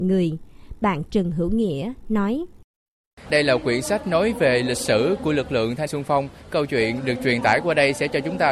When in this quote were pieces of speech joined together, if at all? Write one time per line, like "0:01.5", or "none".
0:05.9
0:06.5